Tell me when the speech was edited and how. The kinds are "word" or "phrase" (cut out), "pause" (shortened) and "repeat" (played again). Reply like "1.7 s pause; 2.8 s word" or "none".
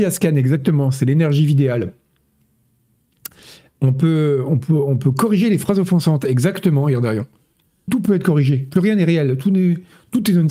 7.9 s word